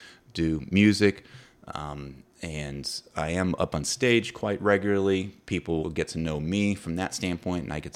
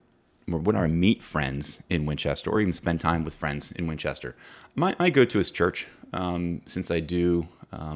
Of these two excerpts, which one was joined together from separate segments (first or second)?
first